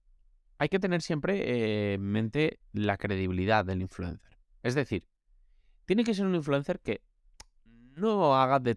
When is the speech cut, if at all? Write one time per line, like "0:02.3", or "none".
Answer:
none